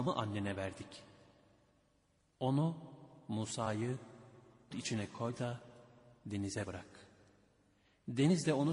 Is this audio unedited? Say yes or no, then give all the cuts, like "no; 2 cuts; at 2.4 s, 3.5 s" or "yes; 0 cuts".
no; 1 cut; at 4.7 s